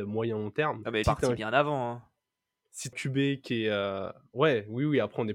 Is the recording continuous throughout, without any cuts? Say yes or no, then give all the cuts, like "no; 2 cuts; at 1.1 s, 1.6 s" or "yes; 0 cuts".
no; 2 cuts; at 1.0 s, 2.9 s